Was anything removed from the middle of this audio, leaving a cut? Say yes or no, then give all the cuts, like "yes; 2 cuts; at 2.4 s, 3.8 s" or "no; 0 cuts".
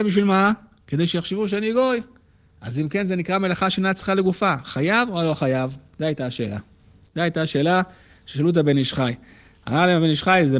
no; 0 cuts